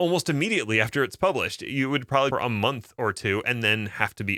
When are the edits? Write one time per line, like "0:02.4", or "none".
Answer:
0:02.3